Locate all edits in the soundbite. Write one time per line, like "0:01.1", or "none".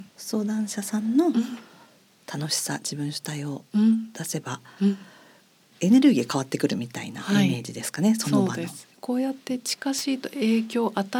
none